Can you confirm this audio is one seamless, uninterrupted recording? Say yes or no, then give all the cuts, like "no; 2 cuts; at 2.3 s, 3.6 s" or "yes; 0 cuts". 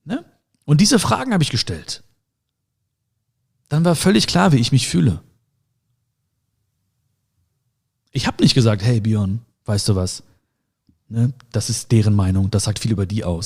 yes; 0 cuts